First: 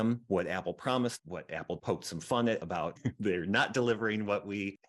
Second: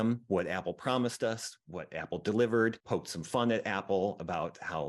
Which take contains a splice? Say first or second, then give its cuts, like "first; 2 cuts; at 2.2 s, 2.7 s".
first; 4 cuts; at 1.2 s, 1.8 s, 2.6 s, 3.0 s